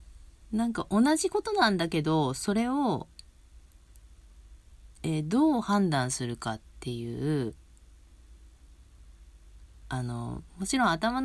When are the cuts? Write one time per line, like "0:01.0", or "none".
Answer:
none